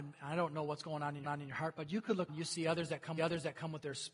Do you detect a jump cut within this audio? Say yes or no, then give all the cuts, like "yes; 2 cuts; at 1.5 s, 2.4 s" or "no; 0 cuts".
yes; 3 cuts; at 1.2 s, 2.3 s, 3.2 s